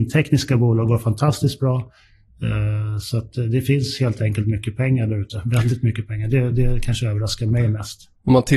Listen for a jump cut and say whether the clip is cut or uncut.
uncut